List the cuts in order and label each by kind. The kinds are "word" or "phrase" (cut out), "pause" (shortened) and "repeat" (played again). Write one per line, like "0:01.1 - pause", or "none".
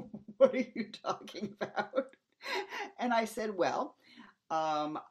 none